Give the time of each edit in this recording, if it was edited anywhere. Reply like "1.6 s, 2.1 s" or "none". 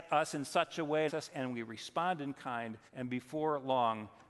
1.1 s, 2.9 s